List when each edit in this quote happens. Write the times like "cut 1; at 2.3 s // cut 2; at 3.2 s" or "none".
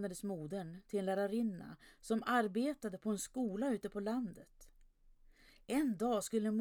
none